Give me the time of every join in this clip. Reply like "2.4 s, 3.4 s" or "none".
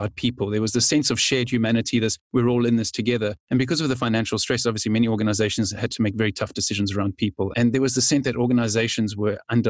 none